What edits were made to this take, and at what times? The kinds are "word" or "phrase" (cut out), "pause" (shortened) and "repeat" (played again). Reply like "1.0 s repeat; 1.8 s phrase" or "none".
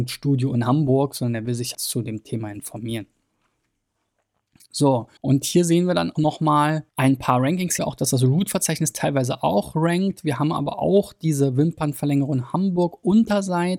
1.7 s word; 5.2 s pause; 6.2 s word; 6.9 s pause; 7.8 s word